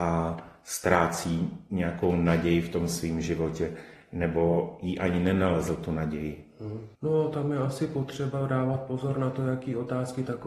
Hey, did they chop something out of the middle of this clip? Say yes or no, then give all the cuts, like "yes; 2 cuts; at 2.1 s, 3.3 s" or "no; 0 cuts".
yes; 1 cut; at 6.9 s